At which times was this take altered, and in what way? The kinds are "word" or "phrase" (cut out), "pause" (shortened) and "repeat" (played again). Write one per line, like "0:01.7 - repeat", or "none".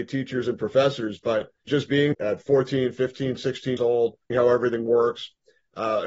0:01.7 - word
0:02.1 - word
0:03.8 - word
0:04.3 - word